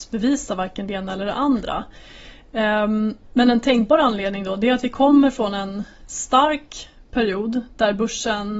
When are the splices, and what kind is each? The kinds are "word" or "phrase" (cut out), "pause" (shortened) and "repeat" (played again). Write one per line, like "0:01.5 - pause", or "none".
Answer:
none